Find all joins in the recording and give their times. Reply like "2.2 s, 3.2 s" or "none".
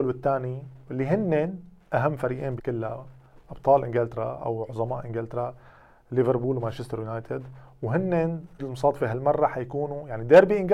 2.6 s, 8.6 s

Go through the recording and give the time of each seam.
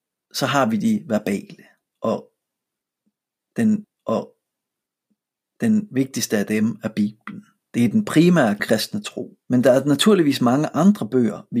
3.8 s, 8.6 s, 9.4 s

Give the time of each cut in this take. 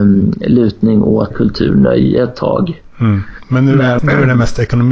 1.3 s, 4.0 s

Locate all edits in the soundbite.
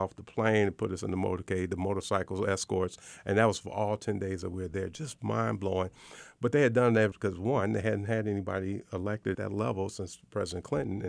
5.2 s, 7.1 s, 9.3 s

